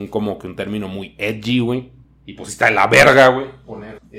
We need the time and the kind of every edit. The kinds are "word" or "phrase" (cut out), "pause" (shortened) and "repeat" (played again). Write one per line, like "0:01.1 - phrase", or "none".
none